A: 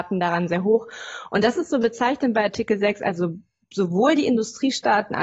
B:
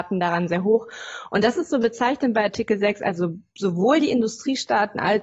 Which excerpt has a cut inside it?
B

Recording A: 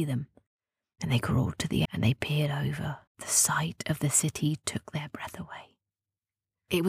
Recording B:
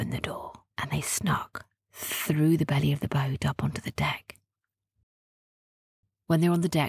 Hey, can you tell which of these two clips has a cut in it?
A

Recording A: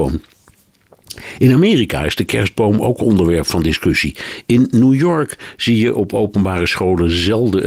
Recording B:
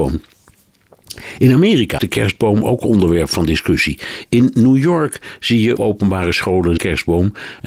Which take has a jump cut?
B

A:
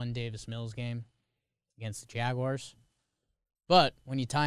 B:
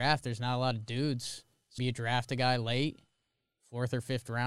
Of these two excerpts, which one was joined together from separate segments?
B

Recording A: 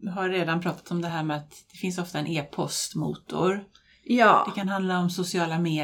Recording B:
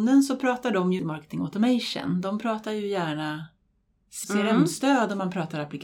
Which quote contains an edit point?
B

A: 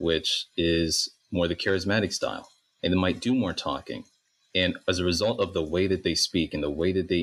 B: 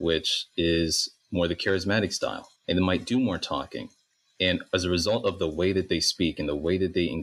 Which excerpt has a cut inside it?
B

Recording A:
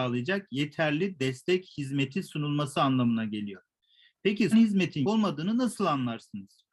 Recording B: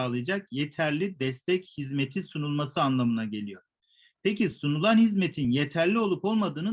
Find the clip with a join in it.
A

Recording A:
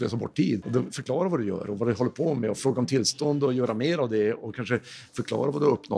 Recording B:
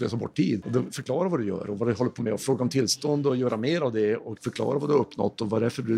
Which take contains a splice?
B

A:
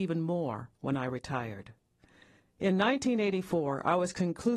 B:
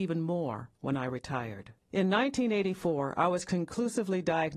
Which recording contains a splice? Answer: B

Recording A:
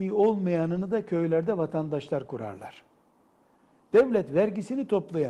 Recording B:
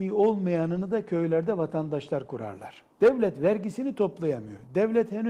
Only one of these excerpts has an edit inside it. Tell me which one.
B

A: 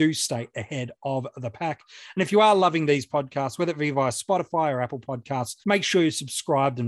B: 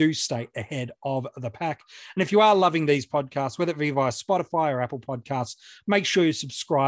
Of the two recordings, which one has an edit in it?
A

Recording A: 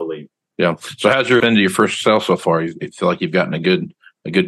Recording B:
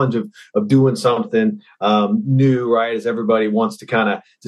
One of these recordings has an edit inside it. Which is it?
A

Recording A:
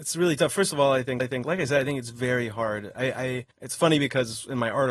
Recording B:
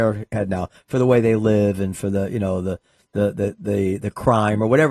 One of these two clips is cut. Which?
A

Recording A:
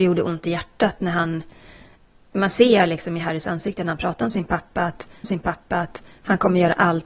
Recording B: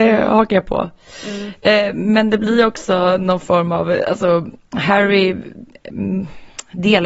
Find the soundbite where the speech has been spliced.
A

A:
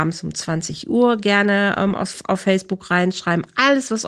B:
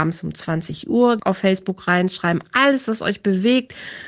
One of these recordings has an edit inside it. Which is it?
B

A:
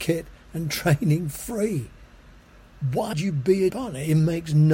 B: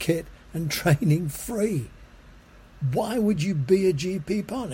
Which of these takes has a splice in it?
A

